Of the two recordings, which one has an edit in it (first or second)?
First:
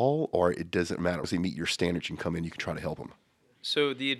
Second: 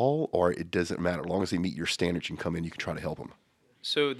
first